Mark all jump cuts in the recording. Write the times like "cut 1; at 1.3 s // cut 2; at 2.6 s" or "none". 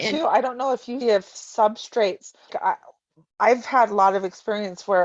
cut 1; at 1.0 s // cut 2; at 2.5 s

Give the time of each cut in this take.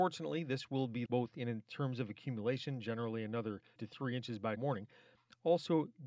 cut 1; at 1.1 s // cut 2; at 3.8 s // cut 3; at 4.6 s

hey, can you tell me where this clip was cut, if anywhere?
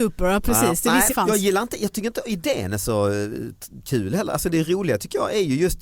cut 1; at 1.1 s

